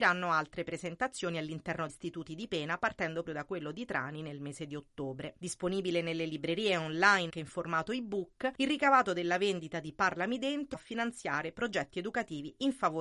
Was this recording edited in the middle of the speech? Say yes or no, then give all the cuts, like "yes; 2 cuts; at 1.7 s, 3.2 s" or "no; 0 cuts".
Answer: yes; 4 cuts; at 1.9 s, 3.2 s, 7.3 s, 10.7 s